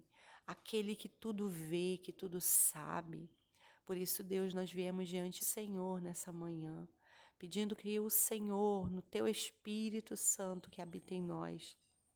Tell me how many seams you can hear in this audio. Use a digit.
1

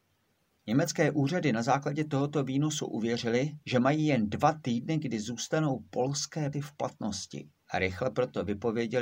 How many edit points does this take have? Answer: 3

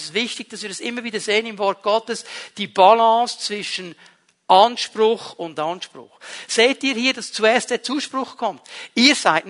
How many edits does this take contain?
1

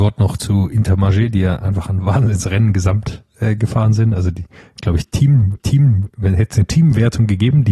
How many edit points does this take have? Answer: 1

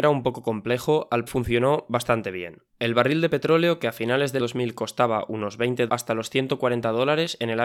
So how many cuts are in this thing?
4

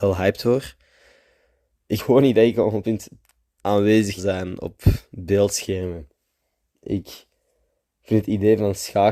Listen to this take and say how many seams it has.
4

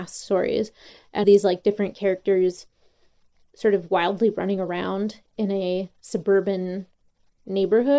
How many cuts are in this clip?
1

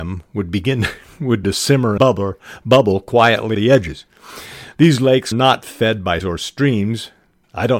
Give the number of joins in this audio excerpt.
5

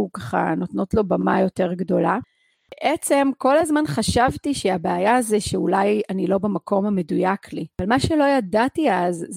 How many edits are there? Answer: 0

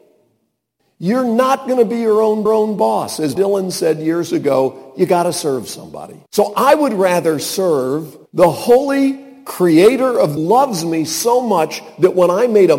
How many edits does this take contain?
5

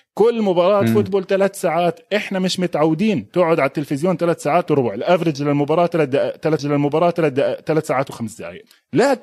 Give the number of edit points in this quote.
2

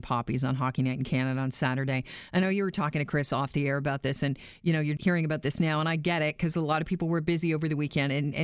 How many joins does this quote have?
1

